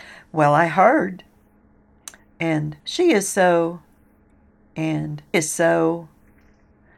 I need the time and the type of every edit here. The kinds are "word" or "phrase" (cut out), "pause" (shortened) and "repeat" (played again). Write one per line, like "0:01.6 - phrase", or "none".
0:02.8 - pause
0:05.3 - word